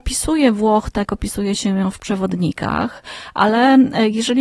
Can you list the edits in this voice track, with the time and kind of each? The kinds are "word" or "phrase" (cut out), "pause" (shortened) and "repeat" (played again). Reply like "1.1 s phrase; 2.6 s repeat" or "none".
1.1 s word